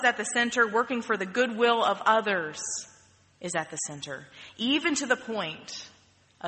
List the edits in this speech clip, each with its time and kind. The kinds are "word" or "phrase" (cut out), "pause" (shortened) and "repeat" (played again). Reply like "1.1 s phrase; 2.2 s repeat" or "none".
none